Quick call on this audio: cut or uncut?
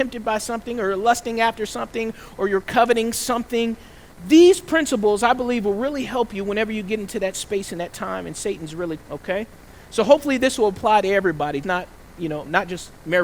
cut